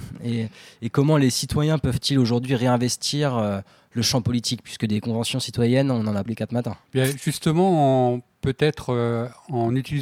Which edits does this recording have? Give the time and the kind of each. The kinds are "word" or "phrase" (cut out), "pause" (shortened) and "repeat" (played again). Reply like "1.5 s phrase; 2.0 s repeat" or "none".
6.3 s phrase; 6.9 s pause

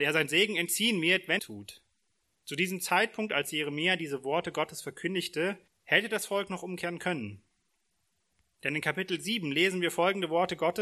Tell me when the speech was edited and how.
1.4 s phrase; 2.2 s pause; 5.7 s pause

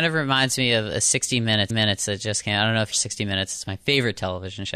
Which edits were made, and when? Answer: 1.7 s repeat; 2.9 s word

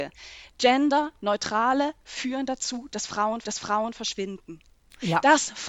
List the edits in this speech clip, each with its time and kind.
2.0 s word; 3.4 s repeat

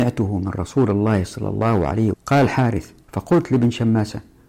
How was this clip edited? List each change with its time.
2.1 s phrase

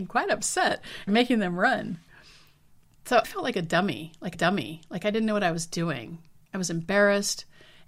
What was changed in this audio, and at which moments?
1.1 s phrase; 3.2 s word; 4.3 s repeat

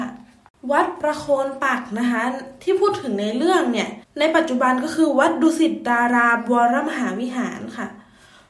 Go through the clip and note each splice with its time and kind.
4.0 s pause

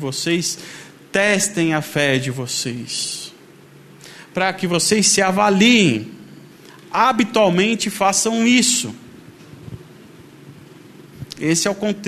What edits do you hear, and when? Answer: 6.5 s pause

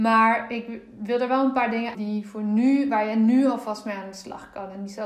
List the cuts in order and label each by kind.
1.9 s word

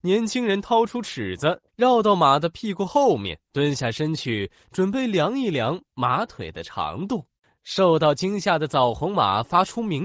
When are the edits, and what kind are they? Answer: 1.7 s pause; 3.4 s pause; 7.3 s pause

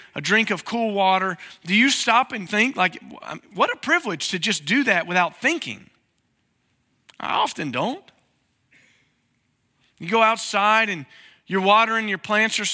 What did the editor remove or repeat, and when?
2.5 s word

